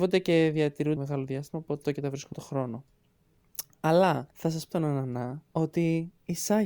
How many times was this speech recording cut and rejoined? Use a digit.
6